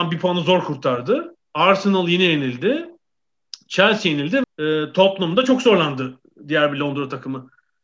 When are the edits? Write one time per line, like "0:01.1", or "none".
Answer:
0:01.4
0:04.4